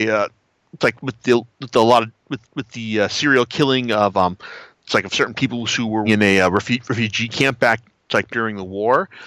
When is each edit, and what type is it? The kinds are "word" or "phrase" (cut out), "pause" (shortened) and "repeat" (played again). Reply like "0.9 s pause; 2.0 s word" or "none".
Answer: 0.9 s word; 2.4 s repeat; 4.7 s pause; 6.1 s word; 8.3 s word